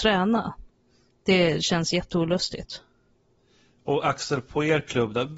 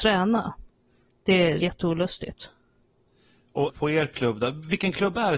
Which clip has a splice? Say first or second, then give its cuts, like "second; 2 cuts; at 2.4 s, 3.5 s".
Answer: second; 2 cuts; at 1.6 s, 3.7 s